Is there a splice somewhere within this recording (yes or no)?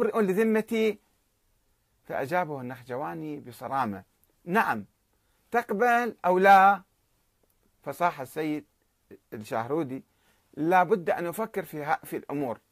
no